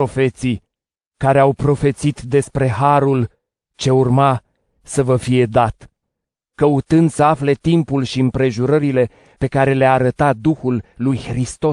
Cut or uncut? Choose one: uncut